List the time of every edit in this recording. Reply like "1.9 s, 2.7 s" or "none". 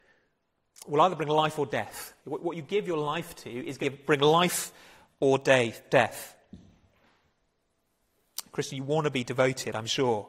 2.2 s, 3.8 s